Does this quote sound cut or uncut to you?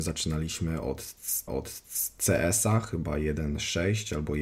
cut